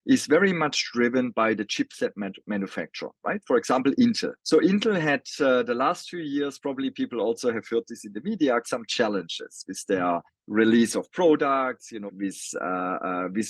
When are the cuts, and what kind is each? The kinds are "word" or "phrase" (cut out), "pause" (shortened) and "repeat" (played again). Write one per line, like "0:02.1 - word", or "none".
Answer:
0:04.4 - pause
0:08.6 - word
0:10.3 - pause
0:12.1 - word